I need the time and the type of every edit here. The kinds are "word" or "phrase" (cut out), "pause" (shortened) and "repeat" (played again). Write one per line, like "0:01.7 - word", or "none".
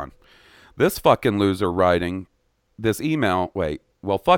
none